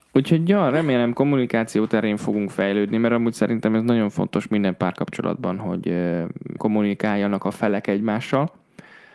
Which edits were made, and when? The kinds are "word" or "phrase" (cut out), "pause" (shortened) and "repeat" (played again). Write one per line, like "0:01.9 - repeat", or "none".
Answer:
0:01.1 - word
0:06.6 - word